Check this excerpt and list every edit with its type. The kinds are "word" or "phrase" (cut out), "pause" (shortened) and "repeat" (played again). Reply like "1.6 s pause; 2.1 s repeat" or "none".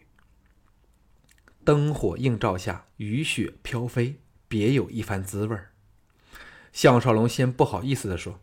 2.9 s pause; 4.4 s pause